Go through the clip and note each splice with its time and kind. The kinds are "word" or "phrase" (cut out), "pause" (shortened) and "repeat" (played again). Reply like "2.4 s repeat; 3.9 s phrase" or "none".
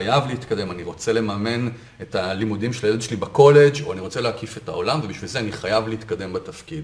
none